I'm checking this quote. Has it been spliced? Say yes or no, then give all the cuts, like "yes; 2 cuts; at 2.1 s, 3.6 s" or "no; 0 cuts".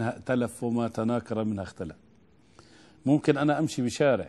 no; 0 cuts